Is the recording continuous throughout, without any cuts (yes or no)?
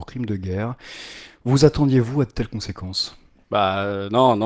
yes